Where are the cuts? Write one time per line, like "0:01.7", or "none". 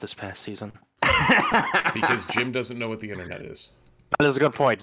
none